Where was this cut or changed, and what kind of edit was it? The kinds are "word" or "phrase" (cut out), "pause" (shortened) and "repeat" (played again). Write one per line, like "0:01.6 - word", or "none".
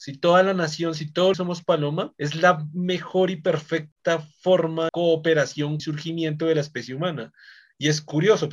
0:01.3 - phrase
0:02.1 - pause
0:04.9 - word
0:05.8 - phrase